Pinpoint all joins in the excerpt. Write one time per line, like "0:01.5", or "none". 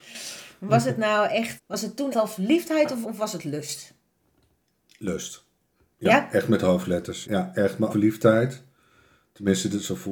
0:01.6
0:02.1
0:03.0
0:07.2
0:07.9

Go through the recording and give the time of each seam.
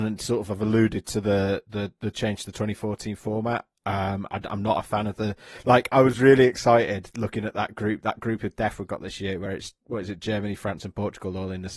none

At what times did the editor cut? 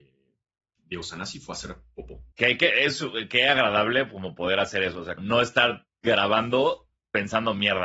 0:02.3
0:05.2

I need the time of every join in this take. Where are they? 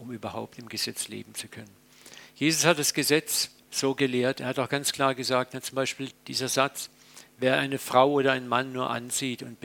0:03.6
0:06.1

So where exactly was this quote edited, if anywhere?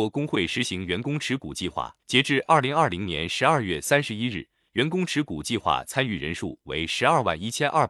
0:02.0

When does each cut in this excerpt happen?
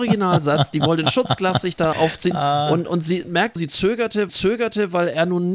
0:01.9
0:03.2
0:03.6
0:04.3

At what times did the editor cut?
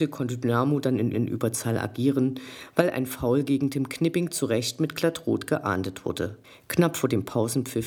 0:01.1
0:06.4

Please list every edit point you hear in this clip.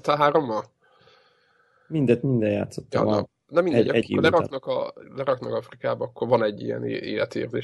0:04.0
0:05.0
0:06.2

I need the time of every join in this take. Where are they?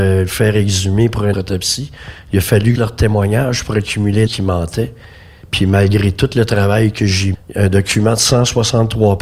0:01.3
0:02.8
0:04.3
0:07.3

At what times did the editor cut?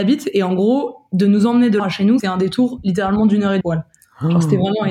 0:01.8
0:02.2
0:03.6

